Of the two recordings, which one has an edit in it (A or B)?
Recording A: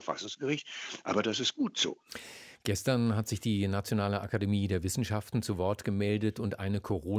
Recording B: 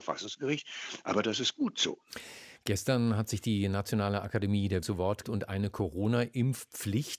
B